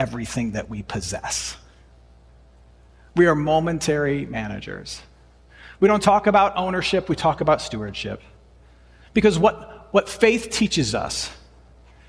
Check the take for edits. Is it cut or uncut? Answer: uncut